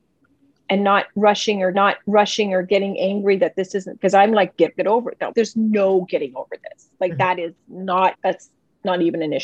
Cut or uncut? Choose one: cut